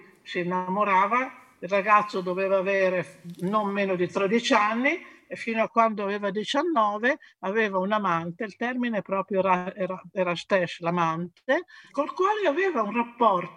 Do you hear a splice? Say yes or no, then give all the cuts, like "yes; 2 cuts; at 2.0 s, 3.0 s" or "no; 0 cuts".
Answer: no; 0 cuts